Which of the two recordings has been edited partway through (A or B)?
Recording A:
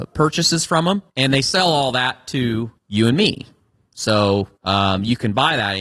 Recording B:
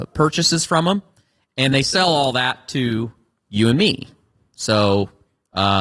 A